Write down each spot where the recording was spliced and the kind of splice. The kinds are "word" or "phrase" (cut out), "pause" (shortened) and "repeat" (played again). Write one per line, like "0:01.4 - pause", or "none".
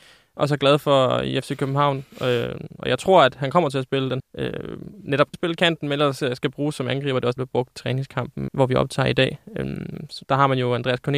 0:04.2 - word
0:05.3 - word
0:07.4 - phrase
0:07.7 - word
0:08.5 - word
0:10.2 - pause